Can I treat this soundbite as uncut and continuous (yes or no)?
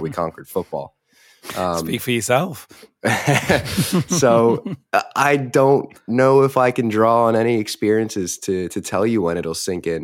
yes